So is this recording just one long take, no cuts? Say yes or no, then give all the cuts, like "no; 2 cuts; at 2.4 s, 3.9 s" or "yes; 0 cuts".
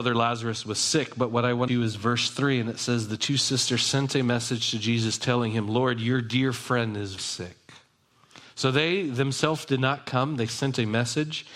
no; 2 cuts; at 1.7 s, 7.2 s